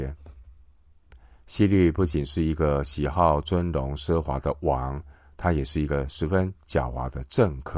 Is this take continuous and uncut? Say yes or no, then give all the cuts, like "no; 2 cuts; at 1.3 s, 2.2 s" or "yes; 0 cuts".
yes; 0 cuts